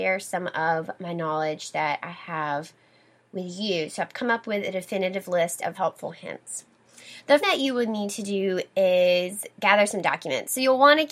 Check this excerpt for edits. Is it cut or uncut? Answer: cut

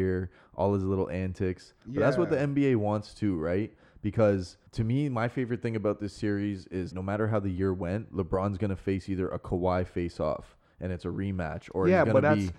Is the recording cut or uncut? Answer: cut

